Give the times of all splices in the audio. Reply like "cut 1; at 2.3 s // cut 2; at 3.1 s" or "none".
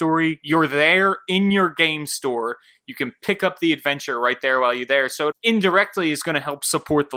cut 1; at 5.3 s

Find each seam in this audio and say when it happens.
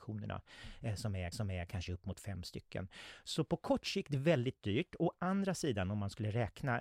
cut 1; at 1.3 s

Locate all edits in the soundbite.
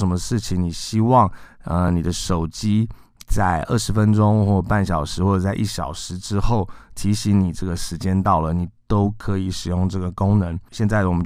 none

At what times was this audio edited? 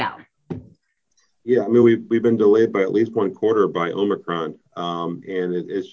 none

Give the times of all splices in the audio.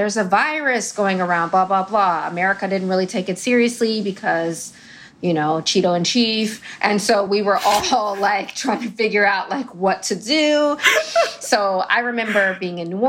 none

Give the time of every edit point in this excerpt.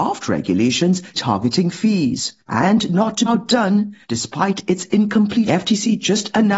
cut 1; at 1.1 s // cut 2; at 2.4 s // cut 3; at 3.3 s // cut 4; at 4.0 s // cut 5; at 5.5 s

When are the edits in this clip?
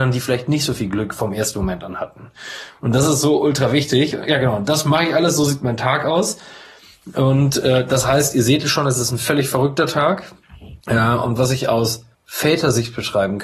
cut 1; at 10.8 s // cut 2; at 12.1 s

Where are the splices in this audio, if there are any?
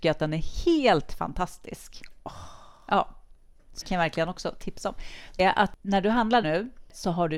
cut 1; at 3.8 s // cut 2; at 5.4 s // cut 3; at 6.4 s

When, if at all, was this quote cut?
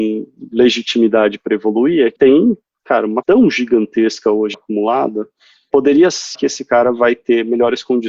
cut 1; at 2.2 s // cut 2; at 3.2 s // cut 3; at 4.5 s // cut 4; at 5.7 s // cut 5; at 6.3 s

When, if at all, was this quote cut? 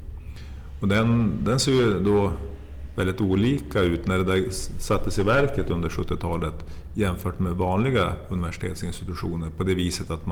none

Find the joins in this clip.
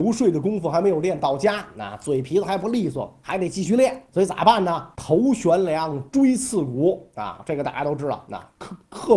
cut 1; at 4.1 s // cut 2; at 4.9 s

